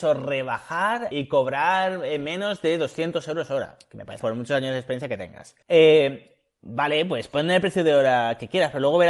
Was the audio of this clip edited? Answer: yes; 3 cuts; at 1.1 s, 4.2 s, 5.6 s

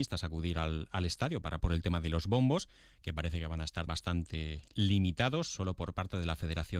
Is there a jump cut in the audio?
yes; 2 cuts; at 1.6 s, 3.9 s

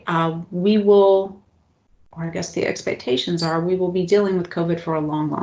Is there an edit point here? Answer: no; 0 cuts

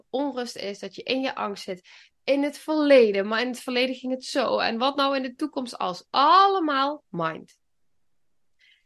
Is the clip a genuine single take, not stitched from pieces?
yes; 0 cuts

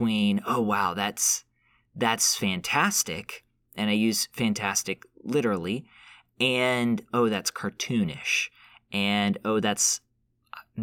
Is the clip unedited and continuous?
yes; 0 cuts

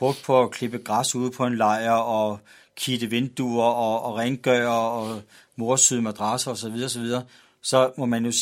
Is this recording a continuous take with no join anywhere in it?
yes; 0 cuts

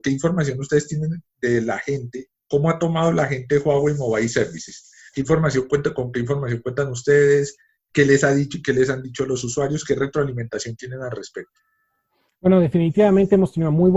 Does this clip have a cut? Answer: no; 0 cuts

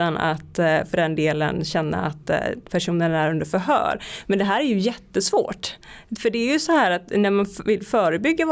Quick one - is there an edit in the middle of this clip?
no; 0 cuts

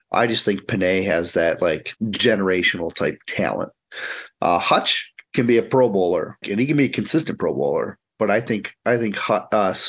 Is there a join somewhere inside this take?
yes; 3 cuts; at 2.0 s, 5.3 s, 6.4 s

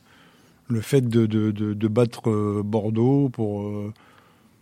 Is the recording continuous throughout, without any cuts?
yes; 0 cuts

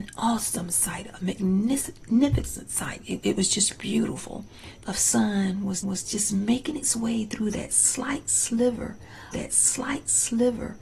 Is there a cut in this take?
yes; 4 cuts; at 3.2 s, 4.8 s, 5.8 s, 9.3 s

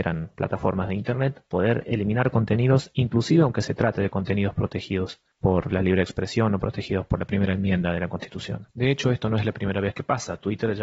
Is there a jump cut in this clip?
yes; 3 cuts; at 1.5 s, 5.3 s, 8.7 s

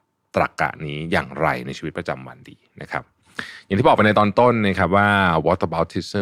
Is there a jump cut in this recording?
no; 0 cuts

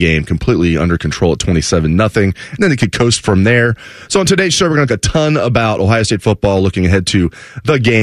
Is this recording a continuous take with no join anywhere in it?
no; 1 cut; at 4.9 s

